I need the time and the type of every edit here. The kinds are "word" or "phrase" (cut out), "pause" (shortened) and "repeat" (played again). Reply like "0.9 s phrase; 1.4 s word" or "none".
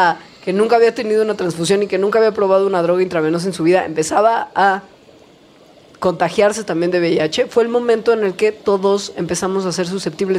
none